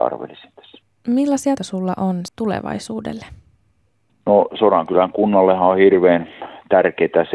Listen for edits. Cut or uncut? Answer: cut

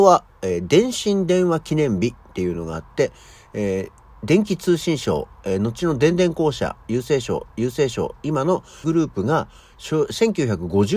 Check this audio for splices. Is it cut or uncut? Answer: cut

